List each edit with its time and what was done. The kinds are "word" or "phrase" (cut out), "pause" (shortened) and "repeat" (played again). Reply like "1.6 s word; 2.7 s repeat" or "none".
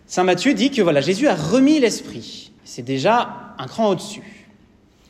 2.6 s pause